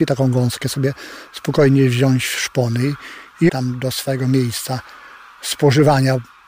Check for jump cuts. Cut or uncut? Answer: cut